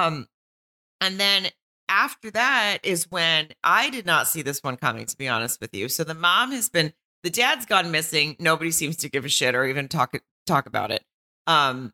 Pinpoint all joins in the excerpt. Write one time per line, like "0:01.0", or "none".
none